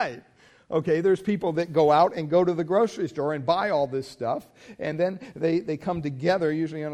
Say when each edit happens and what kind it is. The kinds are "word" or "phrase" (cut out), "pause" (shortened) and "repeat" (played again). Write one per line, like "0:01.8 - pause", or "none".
none